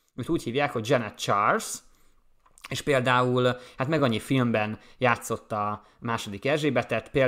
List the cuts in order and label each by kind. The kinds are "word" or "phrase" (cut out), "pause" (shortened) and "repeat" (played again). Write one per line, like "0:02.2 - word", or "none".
none